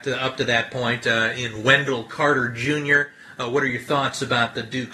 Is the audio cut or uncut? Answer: uncut